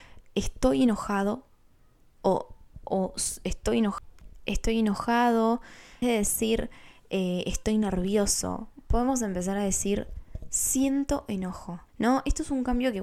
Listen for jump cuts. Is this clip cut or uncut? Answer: cut